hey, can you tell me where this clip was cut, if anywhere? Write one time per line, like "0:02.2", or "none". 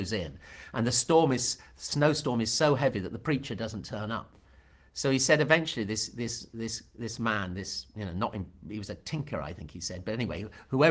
none